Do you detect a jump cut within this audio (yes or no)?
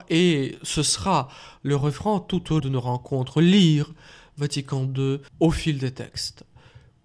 yes